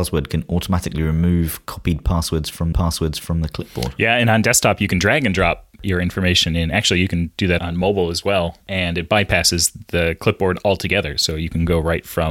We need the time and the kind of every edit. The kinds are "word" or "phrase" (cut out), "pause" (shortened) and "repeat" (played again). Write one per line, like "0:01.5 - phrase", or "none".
0:02.7 - repeat
0:07.6 - word